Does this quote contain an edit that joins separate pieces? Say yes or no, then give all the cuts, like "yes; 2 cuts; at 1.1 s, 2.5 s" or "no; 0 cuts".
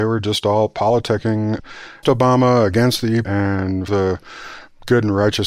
yes; 3 cuts; at 2.0 s, 3.2 s, 3.9 s